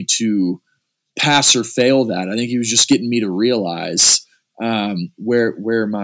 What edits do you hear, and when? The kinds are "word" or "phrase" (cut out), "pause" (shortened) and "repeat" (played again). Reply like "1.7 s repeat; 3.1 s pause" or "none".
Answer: none

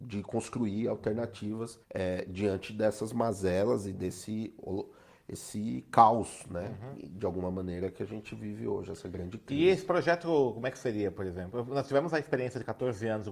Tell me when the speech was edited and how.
1.8 s pause

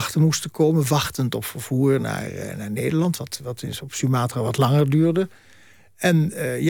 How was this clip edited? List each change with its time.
none

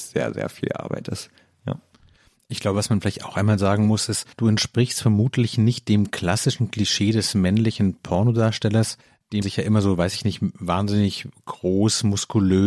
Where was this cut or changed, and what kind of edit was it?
1.4 s pause; 4.3 s pause; 9.4 s word

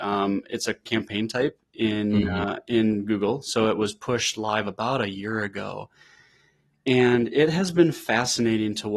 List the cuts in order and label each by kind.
none

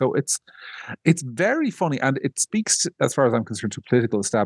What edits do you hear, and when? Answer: none

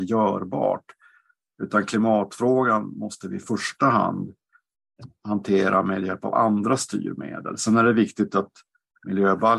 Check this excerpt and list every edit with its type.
none

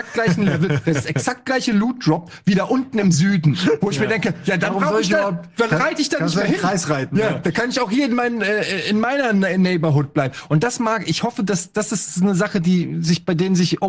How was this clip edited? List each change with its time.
none

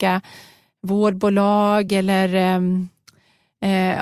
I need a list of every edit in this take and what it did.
none

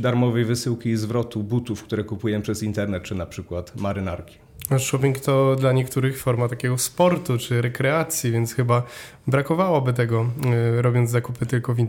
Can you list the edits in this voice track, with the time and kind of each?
none

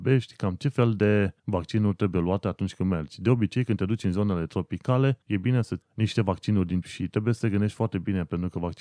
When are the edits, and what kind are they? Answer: 1.4 s pause; 5.2 s pause; 5.8 s word; 6.8 s word

